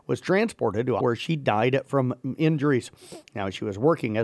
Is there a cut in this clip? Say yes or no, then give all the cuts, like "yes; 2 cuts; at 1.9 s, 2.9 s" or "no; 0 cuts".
yes; 1 cut; at 1.0 s